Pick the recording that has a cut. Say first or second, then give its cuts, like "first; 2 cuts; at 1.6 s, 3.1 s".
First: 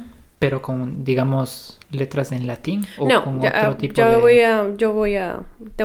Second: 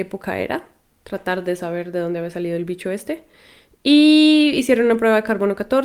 first; 1 cut; at 1.8 s